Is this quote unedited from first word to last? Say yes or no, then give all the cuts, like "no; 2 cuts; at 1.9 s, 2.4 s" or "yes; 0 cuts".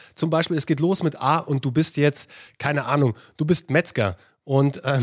yes; 0 cuts